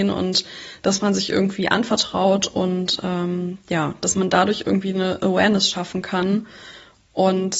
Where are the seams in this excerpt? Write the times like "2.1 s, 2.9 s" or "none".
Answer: none